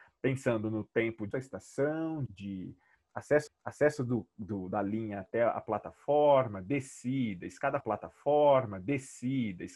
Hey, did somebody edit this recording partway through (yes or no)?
yes